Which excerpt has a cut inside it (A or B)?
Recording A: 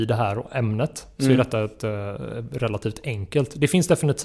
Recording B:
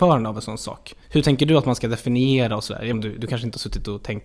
B